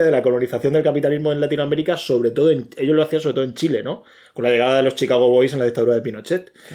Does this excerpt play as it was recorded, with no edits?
yes; 0 cuts

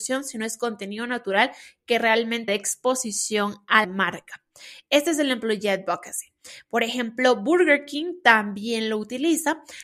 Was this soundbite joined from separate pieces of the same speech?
yes; 2 cuts; at 2.5 s, 3.8 s

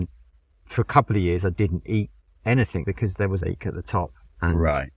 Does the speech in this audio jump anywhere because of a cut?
yes; 2 cuts; at 2.8 s, 3.4 s

